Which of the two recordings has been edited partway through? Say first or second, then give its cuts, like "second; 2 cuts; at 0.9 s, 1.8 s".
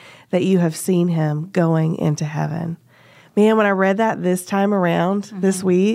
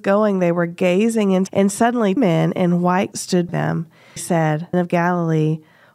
second; 6 cuts; at 1.5 s, 2.2 s, 3.1 s, 3.5 s, 4.2 s, 4.7 s